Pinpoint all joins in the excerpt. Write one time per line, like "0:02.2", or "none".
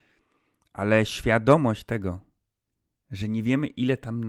none